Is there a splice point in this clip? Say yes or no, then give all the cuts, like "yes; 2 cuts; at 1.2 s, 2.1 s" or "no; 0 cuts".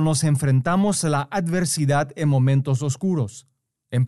no; 0 cuts